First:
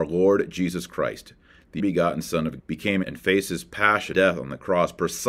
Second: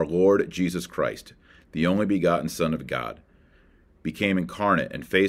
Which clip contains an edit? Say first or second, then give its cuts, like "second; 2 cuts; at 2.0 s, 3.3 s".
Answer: first; 4 cuts; at 1.8 s, 2.6 s, 3.0 s, 4.1 s